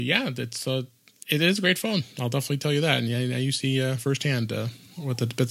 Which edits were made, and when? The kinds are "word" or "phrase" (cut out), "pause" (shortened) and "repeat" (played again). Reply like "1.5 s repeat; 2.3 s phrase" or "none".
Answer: none